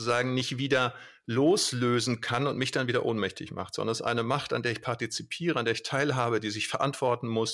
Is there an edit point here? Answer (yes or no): no